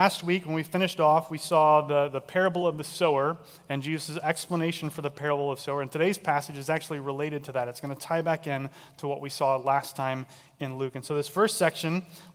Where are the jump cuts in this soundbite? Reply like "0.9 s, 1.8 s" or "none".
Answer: none